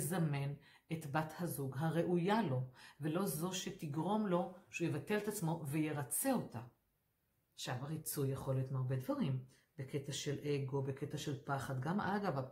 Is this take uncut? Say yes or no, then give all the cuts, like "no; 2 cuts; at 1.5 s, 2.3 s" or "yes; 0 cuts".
no; 1 cut; at 6.9 s